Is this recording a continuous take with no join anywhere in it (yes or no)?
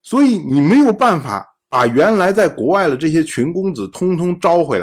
yes